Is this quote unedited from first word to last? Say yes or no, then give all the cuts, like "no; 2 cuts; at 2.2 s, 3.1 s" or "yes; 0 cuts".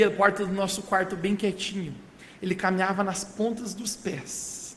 yes; 0 cuts